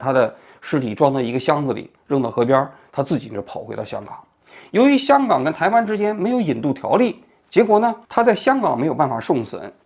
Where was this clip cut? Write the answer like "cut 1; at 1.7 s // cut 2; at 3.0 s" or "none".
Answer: cut 1; at 8.0 s